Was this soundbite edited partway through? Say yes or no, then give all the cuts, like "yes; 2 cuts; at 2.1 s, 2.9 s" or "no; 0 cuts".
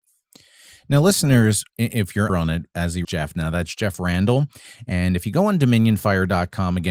yes; 3 cuts; at 1.7 s, 2.3 s, 3.0 s